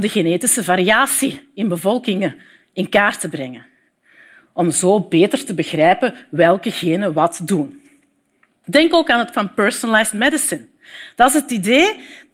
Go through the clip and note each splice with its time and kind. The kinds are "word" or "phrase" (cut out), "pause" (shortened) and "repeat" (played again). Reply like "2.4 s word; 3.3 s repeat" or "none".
9.3 s word